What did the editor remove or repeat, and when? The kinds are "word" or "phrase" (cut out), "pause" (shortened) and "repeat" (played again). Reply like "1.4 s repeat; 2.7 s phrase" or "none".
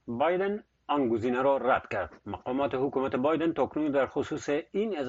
2.2 s pause